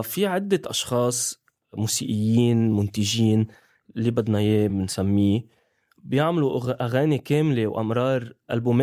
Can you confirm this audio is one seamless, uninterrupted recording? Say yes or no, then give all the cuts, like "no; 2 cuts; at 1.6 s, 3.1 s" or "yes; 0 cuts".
yes; 0 cuts